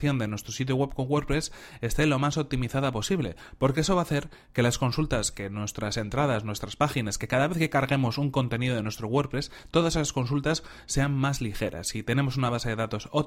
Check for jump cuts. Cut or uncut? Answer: uncut